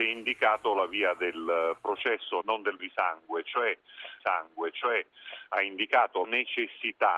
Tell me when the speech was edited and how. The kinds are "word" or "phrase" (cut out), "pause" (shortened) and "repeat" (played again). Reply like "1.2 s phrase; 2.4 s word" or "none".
2.4 s word; 2.8 s word; 4.2 s repeat; 6.2 s word